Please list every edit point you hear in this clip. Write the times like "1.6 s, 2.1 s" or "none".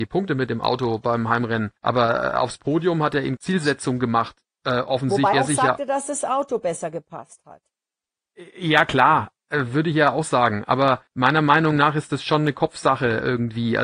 1.8 s, 3.4 s, 5.3 s, 11.1 s

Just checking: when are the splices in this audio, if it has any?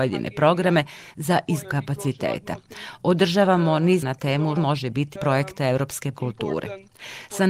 1.6 s, 4.0 s, 4.6 s, 5.2 s, 6.1 s

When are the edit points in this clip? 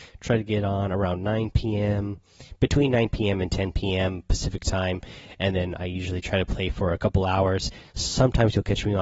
none

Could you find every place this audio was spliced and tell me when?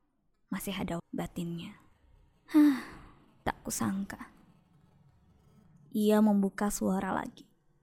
1.0 s

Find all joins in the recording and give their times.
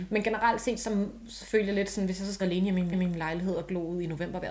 2.4 s, 2.9 s

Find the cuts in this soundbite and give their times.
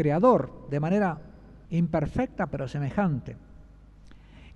none

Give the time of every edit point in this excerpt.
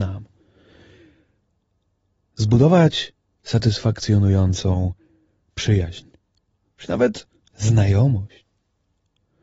none

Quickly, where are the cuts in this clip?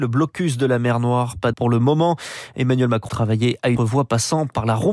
1.5 s, 3.1 s, 3.8 s

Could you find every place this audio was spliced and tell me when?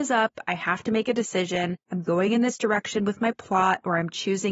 none

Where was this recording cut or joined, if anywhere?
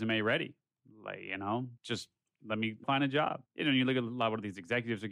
1.8 s, 2.8 s, 3.5 s

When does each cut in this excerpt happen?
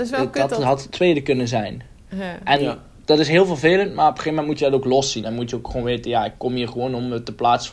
none

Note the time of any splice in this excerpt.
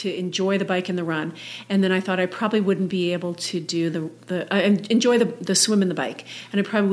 none

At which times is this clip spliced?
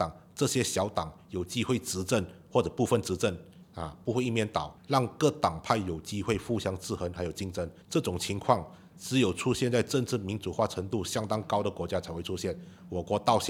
4.8 s, 7.8 s

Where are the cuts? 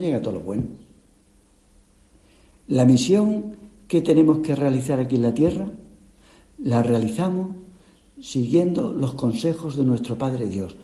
none

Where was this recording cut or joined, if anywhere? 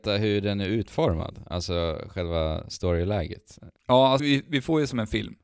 3.8 s, 4.2 s

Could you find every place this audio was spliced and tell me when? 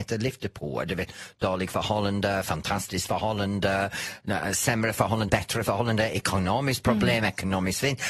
5.3 s

